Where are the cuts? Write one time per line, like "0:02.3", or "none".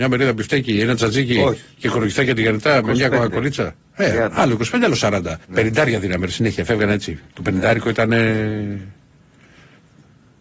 0:05.4
0:07.3